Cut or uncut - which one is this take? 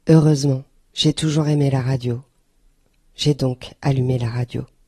uncut